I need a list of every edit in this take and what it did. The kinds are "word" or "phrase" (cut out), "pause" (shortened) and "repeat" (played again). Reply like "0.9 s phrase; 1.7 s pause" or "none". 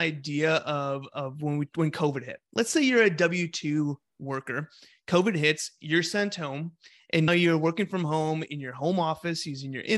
2.5 s pause; 7.3 s word